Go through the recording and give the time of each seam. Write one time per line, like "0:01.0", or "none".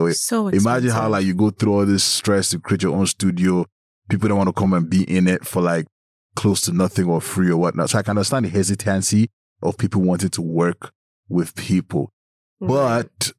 none